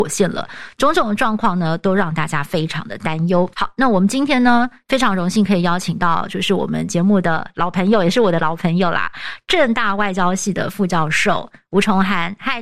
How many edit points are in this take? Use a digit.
1